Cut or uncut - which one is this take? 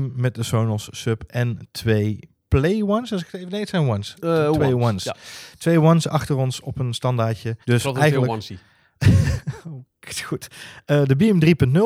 cut